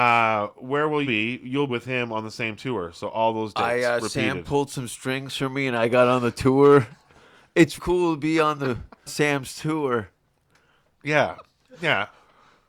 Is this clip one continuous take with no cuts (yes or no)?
no